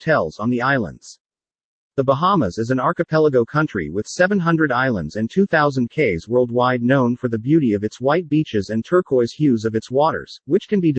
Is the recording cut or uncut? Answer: uncut